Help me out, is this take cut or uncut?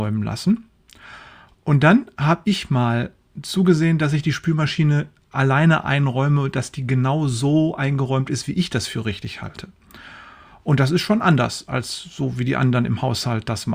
uncut